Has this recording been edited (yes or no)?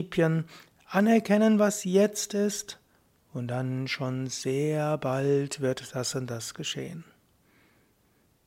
no